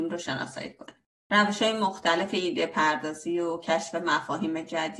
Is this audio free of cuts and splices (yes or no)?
yes